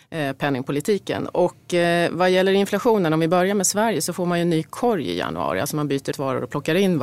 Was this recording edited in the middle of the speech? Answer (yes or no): yes